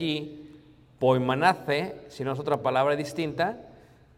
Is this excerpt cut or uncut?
uncut